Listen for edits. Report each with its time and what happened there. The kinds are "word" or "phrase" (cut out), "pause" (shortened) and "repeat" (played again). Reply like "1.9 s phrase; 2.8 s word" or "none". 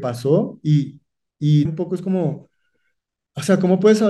1.7 s word